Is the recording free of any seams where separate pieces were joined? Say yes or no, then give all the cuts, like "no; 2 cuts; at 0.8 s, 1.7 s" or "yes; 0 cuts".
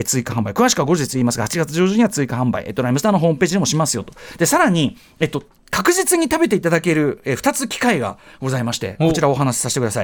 yes; 0 cuts